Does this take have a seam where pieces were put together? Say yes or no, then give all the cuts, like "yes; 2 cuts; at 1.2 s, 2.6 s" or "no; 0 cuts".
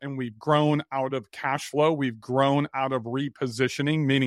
no; 0 cuts